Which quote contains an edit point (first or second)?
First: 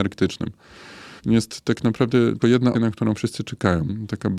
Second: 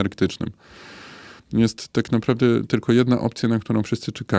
first